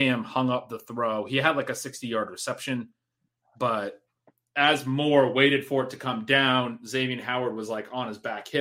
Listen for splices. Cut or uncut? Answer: uncut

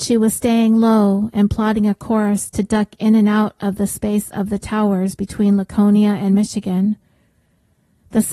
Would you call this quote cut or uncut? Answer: uncut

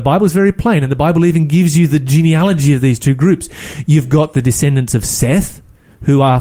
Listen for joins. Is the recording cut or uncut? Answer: uncut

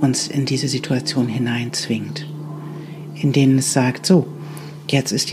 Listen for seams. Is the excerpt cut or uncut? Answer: uncut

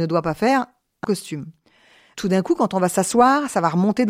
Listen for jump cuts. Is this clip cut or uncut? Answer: cut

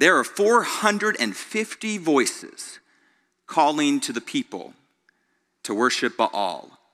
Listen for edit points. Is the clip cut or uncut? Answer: uncut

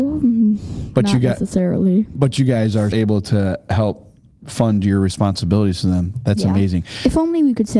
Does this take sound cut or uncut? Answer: cut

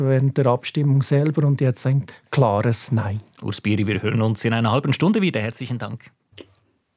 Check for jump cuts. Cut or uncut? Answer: uncut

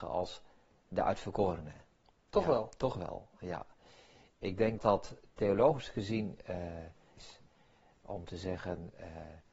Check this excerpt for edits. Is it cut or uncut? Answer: cut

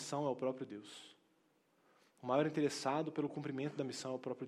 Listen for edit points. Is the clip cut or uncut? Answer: uncut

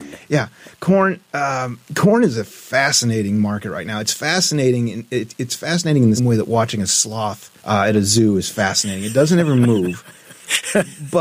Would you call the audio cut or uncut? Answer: cut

